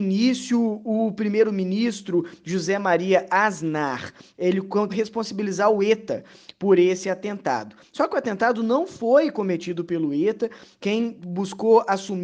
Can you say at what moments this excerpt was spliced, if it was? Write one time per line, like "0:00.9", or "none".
0:04.9